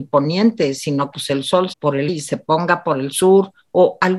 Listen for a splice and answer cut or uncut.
cut